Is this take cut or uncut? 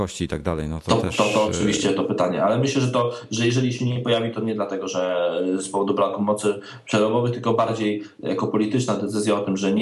uncut